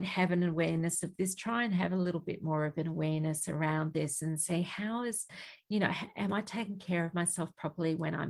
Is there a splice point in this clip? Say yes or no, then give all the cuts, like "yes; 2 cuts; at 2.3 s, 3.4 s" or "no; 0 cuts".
no; 0 cuts